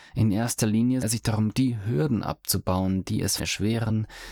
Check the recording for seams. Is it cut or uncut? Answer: cut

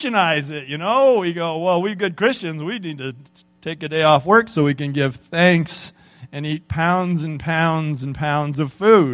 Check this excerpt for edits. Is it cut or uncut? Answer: uncut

